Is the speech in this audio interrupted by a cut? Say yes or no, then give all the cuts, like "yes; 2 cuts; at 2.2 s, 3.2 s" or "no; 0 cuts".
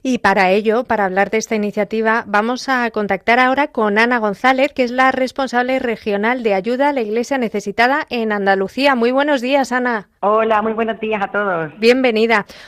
yes; 1 cut; at 10.2 s